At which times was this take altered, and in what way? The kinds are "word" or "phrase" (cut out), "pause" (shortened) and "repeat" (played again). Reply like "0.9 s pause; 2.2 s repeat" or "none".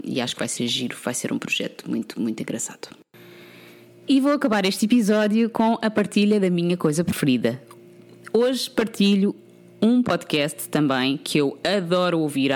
none